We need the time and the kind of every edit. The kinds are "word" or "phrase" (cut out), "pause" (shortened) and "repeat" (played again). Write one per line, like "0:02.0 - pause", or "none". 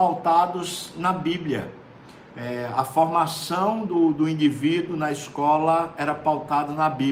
none